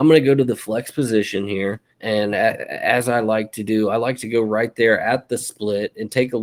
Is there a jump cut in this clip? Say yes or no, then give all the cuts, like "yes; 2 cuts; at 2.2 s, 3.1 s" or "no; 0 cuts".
yes; 1 cut; at 1.9 s